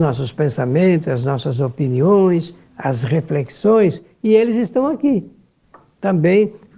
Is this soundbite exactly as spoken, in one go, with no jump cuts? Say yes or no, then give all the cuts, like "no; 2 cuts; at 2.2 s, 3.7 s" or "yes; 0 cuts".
yes; 0 cuts